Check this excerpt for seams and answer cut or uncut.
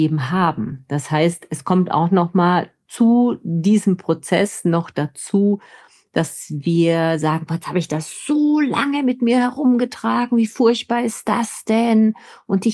uncut